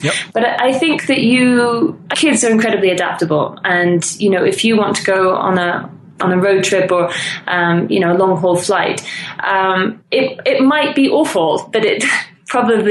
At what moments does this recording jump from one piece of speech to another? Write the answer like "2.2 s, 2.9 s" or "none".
2.1 s, 10.0 s